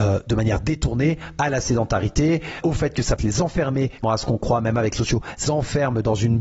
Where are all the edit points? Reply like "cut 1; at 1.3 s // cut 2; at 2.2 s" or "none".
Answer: cut 1; at 2.6 s // cut 2; at 3.2 s // cut 3; at 4.0 s // cut 4; at 5.0 s // cut 5; at 5.4 s